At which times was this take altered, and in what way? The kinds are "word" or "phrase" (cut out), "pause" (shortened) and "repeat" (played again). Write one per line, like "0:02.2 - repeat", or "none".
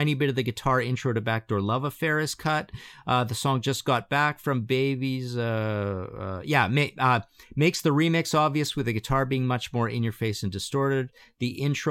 none